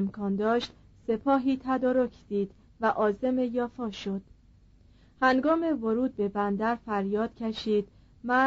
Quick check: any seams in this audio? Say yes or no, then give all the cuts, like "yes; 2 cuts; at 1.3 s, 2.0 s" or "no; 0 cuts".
no; 0 cuts